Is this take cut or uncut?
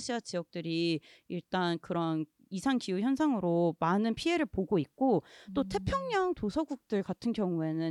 uncut